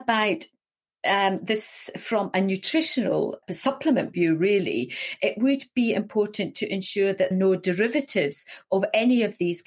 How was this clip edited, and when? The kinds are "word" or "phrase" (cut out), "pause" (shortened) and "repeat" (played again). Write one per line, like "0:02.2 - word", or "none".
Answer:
0:03.4 - word
0:04.1 - phrase
0:07.3 - phrase